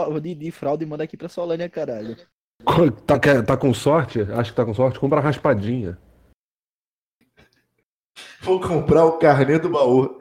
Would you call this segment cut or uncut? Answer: uncut